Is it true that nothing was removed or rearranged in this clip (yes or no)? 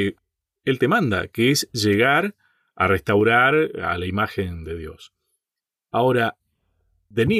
yes